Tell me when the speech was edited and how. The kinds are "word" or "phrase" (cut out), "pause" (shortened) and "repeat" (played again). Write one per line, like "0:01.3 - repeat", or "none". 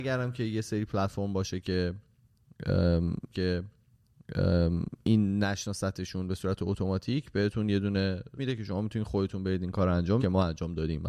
0:03.3 - repeat
0:08.4 - word
0:10.2 - word

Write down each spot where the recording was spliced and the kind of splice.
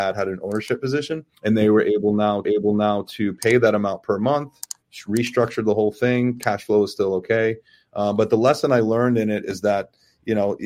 0:01.3 - pause
0:02.4 - repeat

